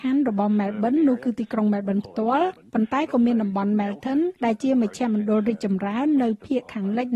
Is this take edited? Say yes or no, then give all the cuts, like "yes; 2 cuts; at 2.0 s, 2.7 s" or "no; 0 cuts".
yes; 1 cut; at 4.3 s